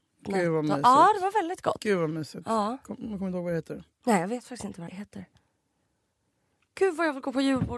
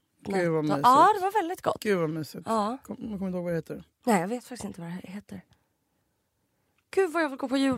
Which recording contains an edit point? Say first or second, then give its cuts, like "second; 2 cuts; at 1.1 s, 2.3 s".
first; 1 cut; at 4.9 s